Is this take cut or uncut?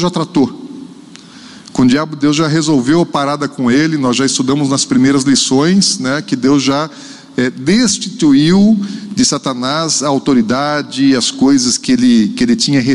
uncut